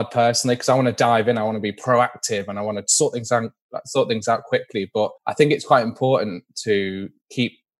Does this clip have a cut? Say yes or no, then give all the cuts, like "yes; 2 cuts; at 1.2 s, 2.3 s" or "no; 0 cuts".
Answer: yes; 1 cut; at 5.2 s